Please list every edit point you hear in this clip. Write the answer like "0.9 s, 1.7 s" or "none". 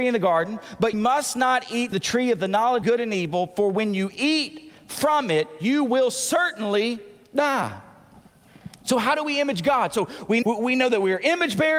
0.9 s, 1.9 s, 2.8 s, 10.4 s